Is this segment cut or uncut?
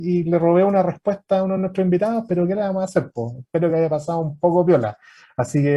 uncut